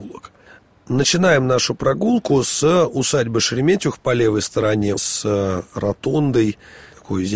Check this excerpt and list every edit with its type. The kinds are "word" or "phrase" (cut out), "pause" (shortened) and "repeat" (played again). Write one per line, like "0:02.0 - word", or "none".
0:05.0 - word